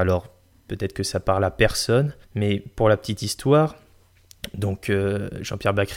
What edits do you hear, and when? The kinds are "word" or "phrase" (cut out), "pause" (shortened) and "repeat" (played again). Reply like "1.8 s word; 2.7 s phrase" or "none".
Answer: 2.2 s pause